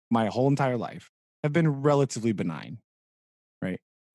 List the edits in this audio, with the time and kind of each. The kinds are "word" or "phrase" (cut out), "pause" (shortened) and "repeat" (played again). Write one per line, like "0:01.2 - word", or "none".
none